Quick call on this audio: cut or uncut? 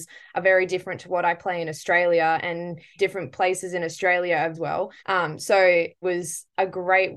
cut